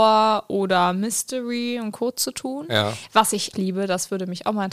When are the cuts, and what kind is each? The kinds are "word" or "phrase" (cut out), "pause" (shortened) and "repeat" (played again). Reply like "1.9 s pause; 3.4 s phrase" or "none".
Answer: 3.5 s word

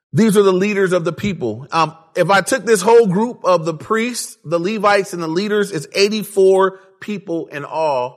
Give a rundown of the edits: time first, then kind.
none

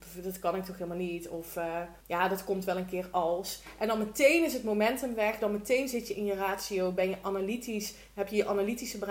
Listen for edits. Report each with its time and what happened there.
2.0 s pause

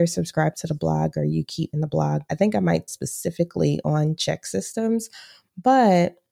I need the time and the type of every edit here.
1.7 s word; 2.3 s word; 2.9 s phrase

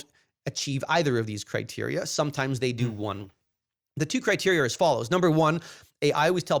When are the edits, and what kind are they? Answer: none

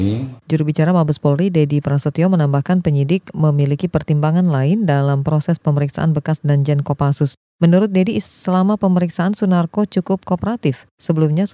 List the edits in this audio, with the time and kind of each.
none

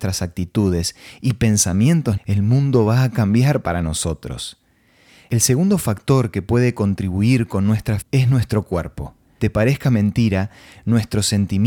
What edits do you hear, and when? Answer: 2.2 s word; 8.0 s word; 9.4 s word

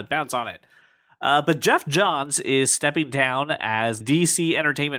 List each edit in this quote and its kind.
4.0 s word

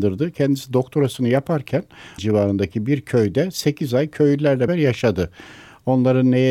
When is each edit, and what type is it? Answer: 2.2 s word; 4.7 s word

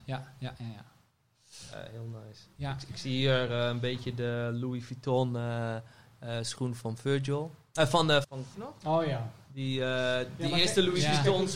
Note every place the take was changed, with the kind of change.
8.2 s word; 8.5 s phrase

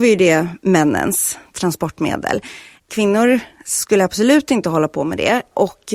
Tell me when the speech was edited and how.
none

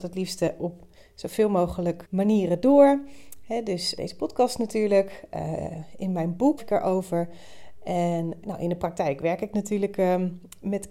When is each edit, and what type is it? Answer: 2.0 s word; 4.0 s word; 6.6 s word; 8.4 s word

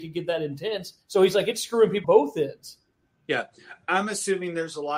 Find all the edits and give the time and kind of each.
1.0 s pause; 2.0 s word; 3.8 s word

